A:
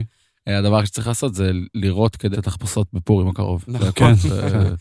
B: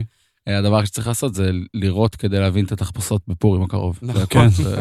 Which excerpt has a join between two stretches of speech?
A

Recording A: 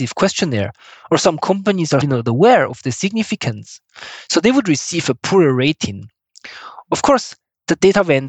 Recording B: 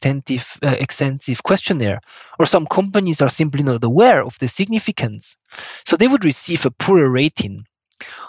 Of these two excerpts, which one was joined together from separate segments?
A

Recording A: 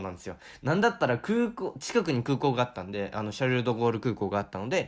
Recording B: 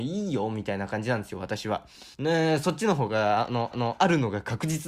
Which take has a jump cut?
B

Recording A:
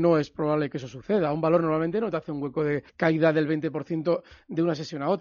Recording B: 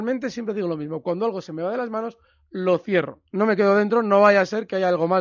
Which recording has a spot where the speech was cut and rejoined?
A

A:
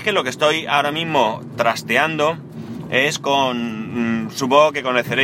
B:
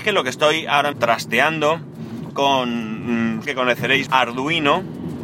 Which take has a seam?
B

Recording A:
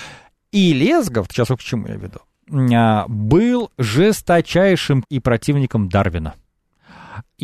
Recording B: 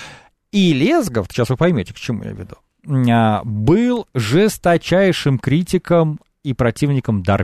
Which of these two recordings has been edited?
A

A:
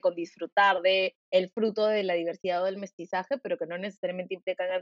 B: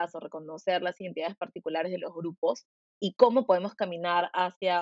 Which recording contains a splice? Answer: A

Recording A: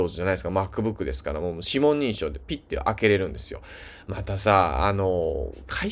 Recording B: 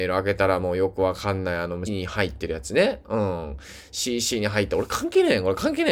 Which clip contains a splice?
B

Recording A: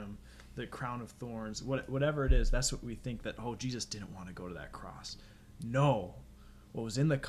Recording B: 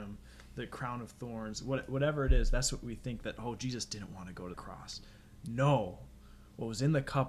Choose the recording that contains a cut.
B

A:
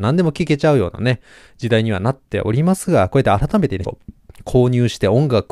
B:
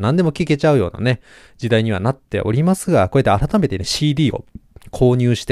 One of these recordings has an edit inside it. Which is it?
A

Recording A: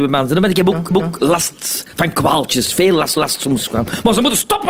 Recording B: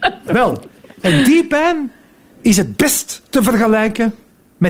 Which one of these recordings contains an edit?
A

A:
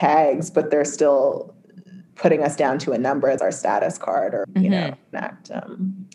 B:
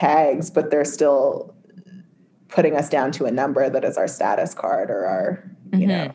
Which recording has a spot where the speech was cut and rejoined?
A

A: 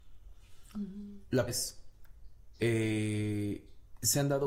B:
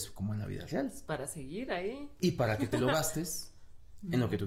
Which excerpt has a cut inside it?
A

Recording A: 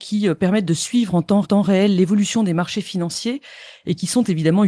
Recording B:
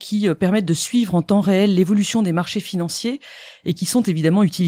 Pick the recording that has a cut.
A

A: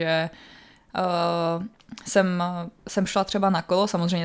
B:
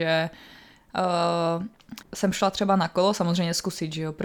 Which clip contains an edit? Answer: B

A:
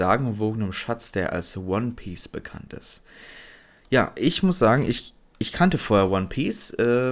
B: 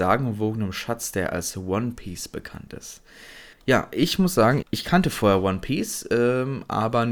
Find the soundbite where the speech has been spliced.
B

